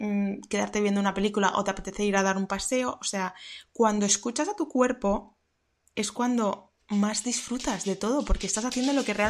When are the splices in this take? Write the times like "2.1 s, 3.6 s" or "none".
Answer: none